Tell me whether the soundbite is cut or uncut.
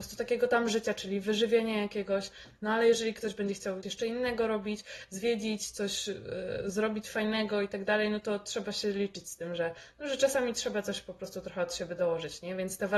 cut